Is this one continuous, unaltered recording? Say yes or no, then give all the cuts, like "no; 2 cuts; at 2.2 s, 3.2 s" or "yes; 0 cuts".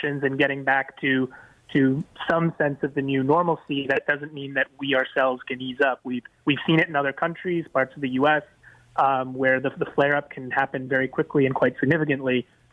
yes; 0 cuts